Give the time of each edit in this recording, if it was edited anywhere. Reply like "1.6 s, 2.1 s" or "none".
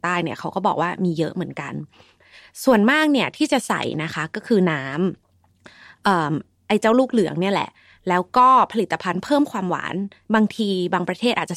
5.2 s